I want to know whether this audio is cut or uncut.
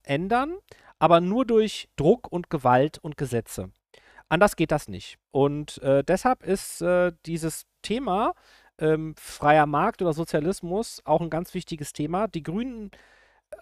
uncut